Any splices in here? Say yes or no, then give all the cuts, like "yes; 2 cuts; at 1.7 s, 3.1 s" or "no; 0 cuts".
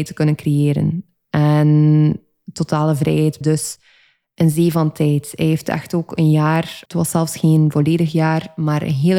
yes; 2 cuts; at 3.4 s, 6.9 s